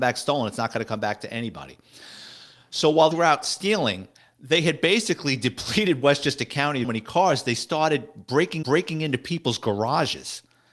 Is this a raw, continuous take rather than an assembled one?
no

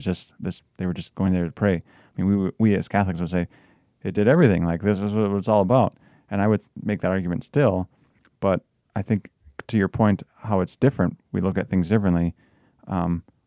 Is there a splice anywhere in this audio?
no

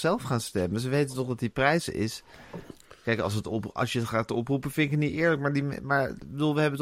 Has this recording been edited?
no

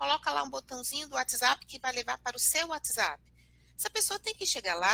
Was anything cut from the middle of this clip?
no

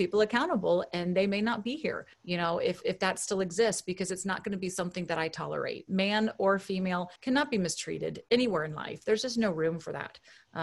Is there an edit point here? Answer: yes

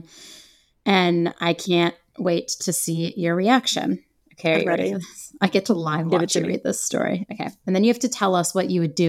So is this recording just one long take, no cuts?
yes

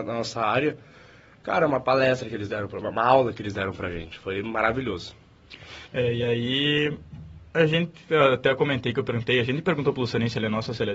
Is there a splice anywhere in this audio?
yes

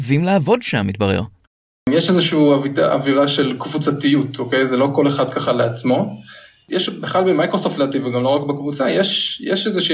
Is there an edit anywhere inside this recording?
no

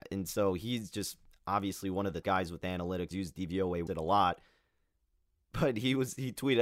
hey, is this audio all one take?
no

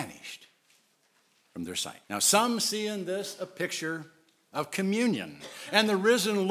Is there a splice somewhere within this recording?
yes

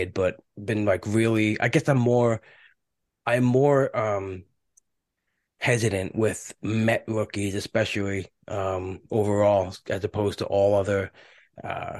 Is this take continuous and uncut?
yes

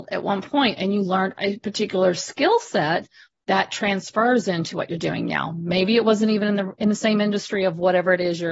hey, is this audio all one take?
yes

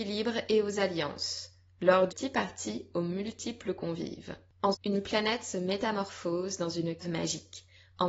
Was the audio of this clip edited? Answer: yes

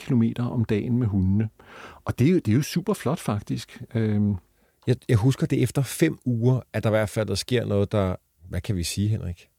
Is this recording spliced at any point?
no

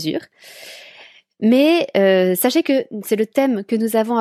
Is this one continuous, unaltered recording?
yes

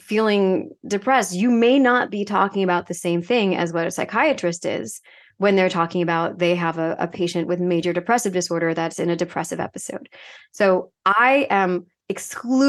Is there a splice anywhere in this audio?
no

